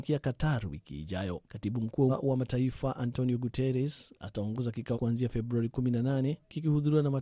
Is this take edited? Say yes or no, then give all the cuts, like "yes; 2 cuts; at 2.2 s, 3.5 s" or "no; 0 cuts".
yes; 3 cuts; at 1.5 s, 2.1 s, 4.9 s